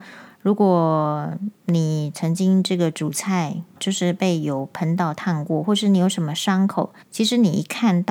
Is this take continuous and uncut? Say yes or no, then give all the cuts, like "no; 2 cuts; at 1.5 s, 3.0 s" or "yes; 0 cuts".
no; 3 cuts; at 1.6 s, 3.8 s, 7.0 s